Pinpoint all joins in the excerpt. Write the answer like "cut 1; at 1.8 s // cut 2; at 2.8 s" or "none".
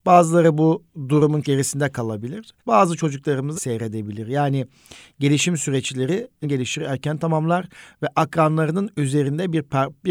cut 1; at 1.4 s // cut 2; at 2.6 s // cut 3; at 3.5 s // cut 4; at 6.4 s

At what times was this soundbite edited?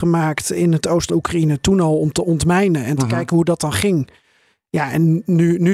cut 1; at 1.1 s

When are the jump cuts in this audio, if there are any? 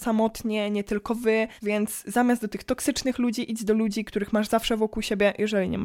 cut 1; at 1.6 s

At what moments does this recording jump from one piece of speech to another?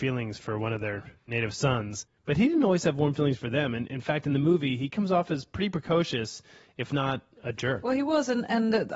none

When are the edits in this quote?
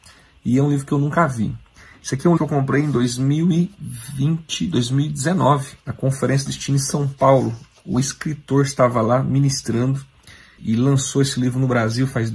cut 1; at 2.4 s // cut 2; at 5.8 s // cut 3; at 10.6 s

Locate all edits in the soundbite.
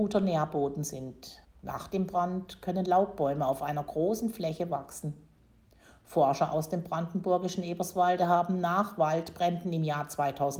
cut 1; at 1.4 s

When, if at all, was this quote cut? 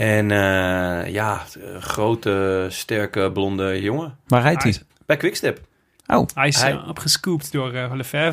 cut 1; at 4.9 s

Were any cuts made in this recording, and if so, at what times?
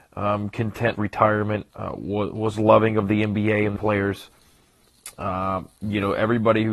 cut 1; at 0.9 s // cut 2; at 1.7 s // cut 3; at 3.8 s

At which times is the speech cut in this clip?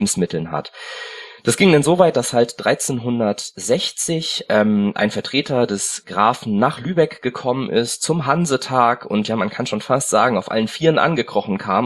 none

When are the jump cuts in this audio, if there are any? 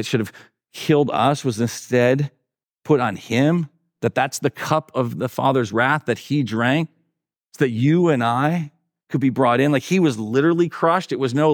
none

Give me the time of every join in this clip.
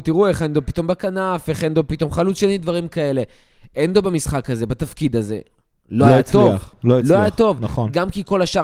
none

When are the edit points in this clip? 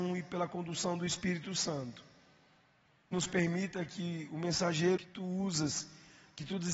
cut 1; at 3.1 s // cut 2; at 5.0 s

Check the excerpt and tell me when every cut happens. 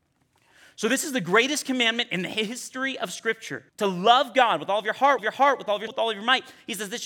cut 1; at 3.7 s // cut 2; at 5.2 s // cut 3; at 5.9 s

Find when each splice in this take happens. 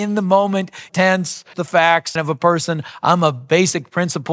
cut 1; at 0.9 s // cut 2; at 1.5 s // cut 3; at 2.2 s

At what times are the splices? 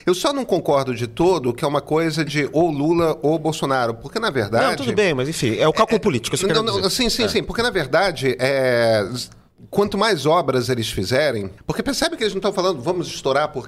cut 1; at 11.6 s

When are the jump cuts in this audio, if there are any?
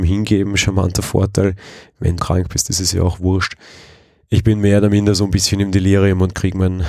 cut 1; at 2.2 s

